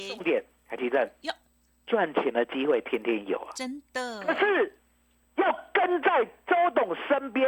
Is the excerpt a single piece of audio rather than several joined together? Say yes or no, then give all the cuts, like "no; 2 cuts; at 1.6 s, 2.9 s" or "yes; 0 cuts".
yes; 0 cuts